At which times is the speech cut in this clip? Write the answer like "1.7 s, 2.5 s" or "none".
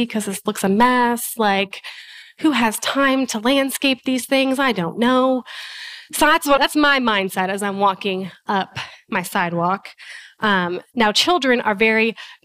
6.6 s